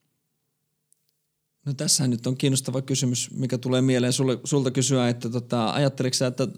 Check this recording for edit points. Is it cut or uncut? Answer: uncut